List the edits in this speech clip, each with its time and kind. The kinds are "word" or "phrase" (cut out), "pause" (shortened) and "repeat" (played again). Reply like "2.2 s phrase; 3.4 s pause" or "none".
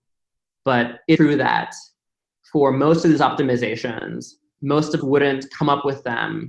1.2 s word; 5.0 s word